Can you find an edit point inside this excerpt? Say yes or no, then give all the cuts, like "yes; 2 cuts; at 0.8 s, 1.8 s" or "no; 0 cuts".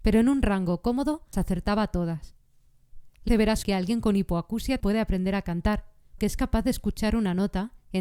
yes; 5 cuts; at 1.3 s, 3.3 s, 3.6 s, 4.8 s, 6.2 s